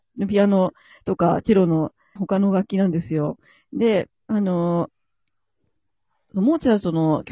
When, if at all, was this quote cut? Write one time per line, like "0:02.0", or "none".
0:02.2
0:04.1